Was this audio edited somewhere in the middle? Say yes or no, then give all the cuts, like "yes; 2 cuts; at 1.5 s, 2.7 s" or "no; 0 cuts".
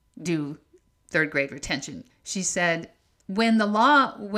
no; 0 cuts